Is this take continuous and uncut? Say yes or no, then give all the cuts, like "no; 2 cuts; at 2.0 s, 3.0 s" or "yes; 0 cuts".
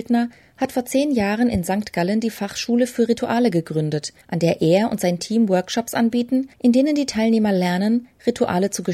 no; 2 cuts; at 4.2 s, 6.5 s